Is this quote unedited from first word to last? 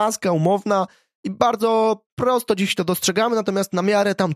yes; 0 cuts

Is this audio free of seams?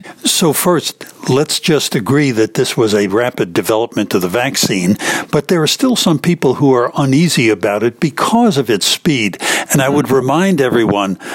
no; 1 cut; at 3.1 s

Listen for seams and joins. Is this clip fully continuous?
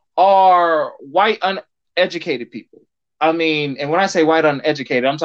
yes; 0 cuts

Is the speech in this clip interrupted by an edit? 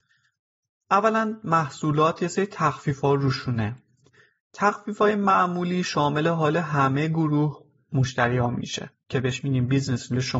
no; 0 cuts

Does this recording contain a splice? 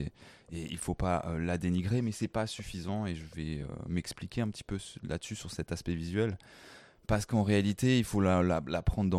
no; 0 cuts

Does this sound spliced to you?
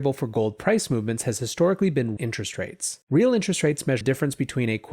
yes; 3 cuts; at 2.2 s, 3.0 s, 4.0 s

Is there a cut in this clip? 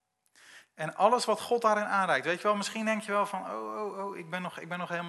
no; 0 cuts

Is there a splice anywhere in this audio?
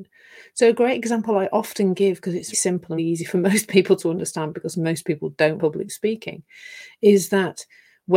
yes; 3 cuts; at 2.5 s, 3.0 s, 5.6 s

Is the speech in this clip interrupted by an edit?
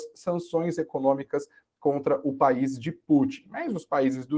no; 0 cuts

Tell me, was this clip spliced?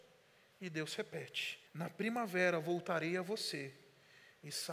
yes; 1 cut; at 1.7 s

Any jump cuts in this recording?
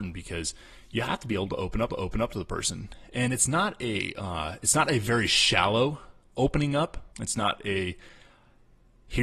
yes; 2 cuts; at 1.9 s, 7.1 s

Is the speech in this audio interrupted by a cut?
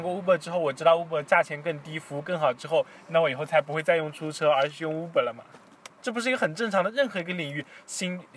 yes; 1 cut; at 5.9 s

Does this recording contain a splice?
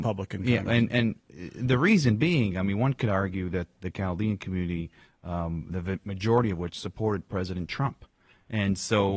no; 0 cuts

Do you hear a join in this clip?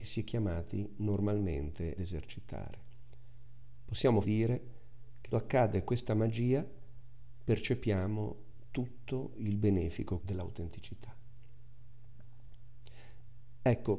yes; 4 cuts; at 2.0 s, 4.2 s, 5.3 s, 10.2 s

